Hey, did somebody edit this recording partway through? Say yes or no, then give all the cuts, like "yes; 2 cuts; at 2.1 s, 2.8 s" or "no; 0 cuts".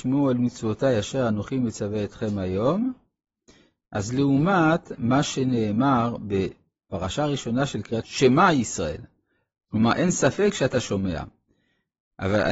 yes; 1 cut; at 8.0 s